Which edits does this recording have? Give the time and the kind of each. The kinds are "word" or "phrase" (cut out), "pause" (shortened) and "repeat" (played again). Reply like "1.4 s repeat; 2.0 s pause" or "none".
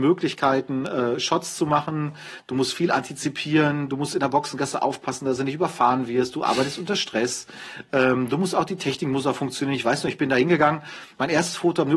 none